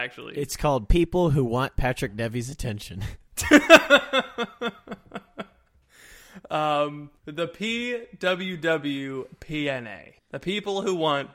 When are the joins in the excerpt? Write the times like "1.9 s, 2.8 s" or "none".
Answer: 7.2 s, 10.2 s